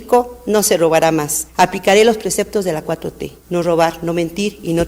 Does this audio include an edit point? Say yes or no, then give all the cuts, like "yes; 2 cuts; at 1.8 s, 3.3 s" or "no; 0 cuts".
no; 0 cuts